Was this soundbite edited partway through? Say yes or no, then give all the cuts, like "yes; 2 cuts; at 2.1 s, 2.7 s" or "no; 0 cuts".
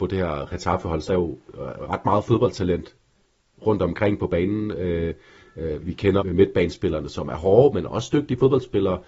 yes; 3 cuts; at 1.1 s, 5.8 s, 6.2 s